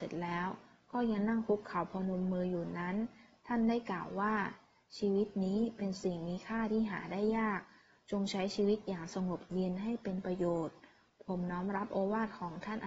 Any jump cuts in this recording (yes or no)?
no